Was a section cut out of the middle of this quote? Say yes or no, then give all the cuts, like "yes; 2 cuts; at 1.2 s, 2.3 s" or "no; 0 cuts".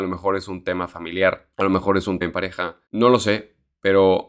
yes; 3 cuts; at 1.5 s, 2.2 s, 2.9 s